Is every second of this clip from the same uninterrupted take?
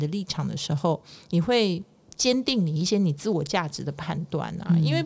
no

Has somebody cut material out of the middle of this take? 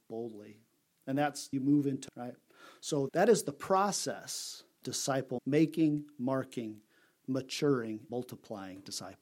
yes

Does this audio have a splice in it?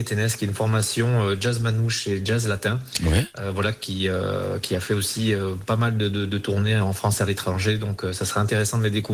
no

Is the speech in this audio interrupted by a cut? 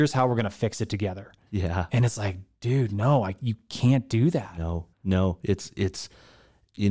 yes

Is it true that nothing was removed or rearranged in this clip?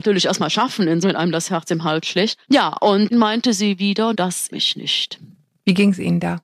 no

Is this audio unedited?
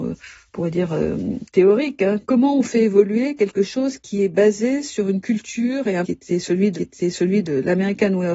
no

